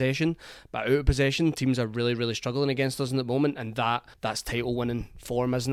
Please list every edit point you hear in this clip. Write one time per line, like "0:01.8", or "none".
0:04.1